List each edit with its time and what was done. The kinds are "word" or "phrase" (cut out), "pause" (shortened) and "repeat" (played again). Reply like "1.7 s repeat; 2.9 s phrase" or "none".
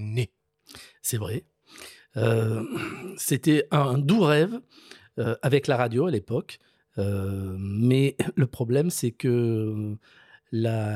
none